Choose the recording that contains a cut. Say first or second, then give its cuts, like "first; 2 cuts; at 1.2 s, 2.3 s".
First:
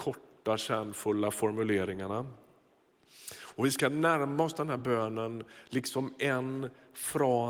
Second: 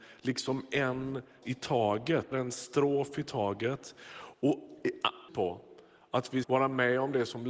second; 4 cuts; at 1.4 s, 2.3 s, 5.3 s, 6.4 s